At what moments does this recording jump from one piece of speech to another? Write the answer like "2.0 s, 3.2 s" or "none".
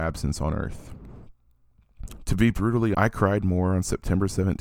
2.9 s